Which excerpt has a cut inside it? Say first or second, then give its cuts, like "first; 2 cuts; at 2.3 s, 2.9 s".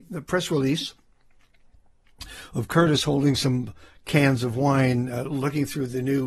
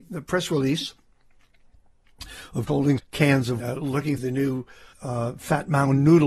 second; 5 cuts; at 2.7 s, 3.0 s, 3.6 s, 4.2 s, 4.9 s